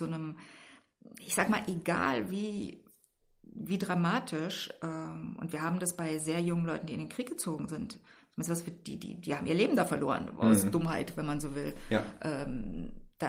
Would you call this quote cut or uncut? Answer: uncut